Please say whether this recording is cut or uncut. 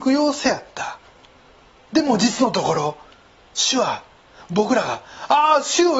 uncut